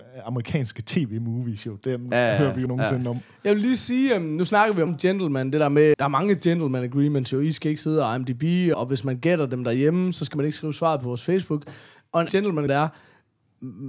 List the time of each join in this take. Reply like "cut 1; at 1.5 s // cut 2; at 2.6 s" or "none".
cut 1; at 2.7 s // cut 2; at 4.9 s // cut 3; at 5.9 s // cut 4; at 8.7 s // cut 5; at 12.3 s // cut 6; at 12.7 s